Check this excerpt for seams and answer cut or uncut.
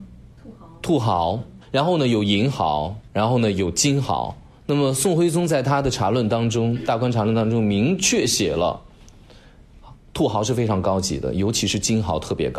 cut